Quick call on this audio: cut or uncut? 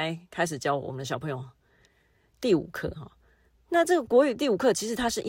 uncut